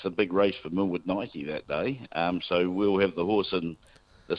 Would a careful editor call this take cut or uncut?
uncut